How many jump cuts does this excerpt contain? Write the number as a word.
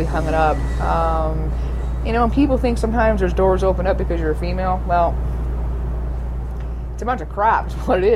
zero